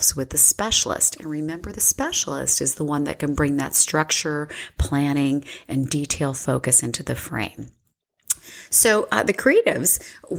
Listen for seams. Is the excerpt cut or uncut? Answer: uncut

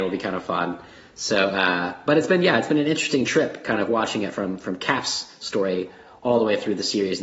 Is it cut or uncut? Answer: uncut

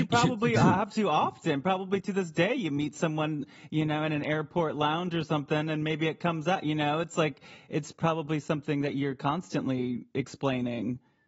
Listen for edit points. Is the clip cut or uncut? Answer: uncut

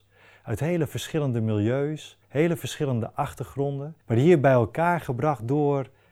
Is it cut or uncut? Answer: cut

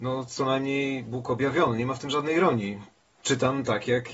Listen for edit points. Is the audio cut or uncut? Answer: uncut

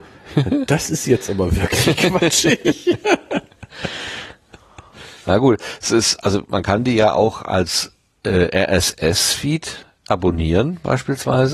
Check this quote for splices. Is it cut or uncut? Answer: uncut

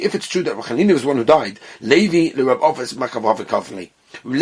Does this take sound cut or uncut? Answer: uncut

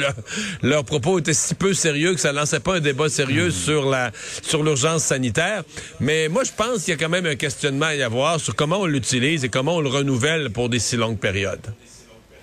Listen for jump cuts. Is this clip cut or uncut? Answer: uncut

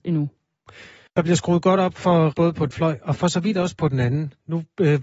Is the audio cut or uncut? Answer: cut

